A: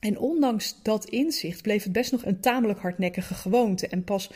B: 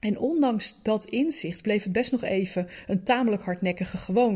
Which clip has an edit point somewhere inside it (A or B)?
A